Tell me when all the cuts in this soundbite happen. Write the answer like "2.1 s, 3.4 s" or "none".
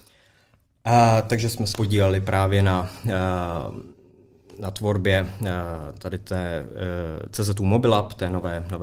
1.7 s